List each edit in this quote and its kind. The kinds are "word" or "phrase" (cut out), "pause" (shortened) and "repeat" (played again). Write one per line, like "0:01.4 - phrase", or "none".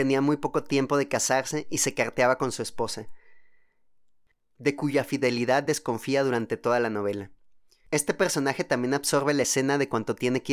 none

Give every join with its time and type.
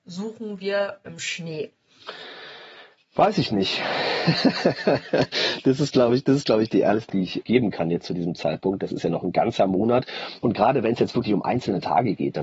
0:01.1 - word
0:07.1 - word
0:07.4 - word

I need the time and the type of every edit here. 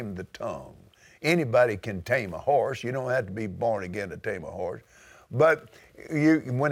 none

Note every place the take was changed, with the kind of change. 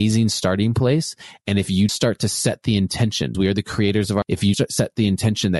0:01.9 - word
0:03.3 - word
0:04.2 - word
0:04.5 - word

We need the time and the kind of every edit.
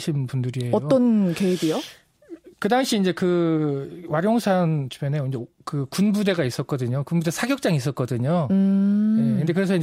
none

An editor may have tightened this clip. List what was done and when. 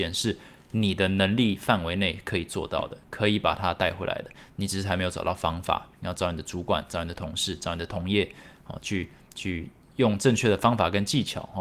none

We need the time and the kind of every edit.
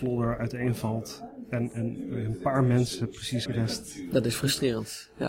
0:03.5 - phrase

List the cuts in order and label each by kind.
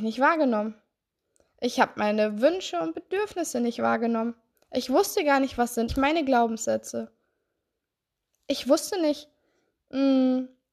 0:04.5 - pause
0:05.9 - word

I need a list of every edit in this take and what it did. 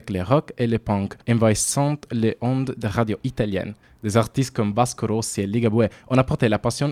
0:01.2 - pause
0:03.8 - pause

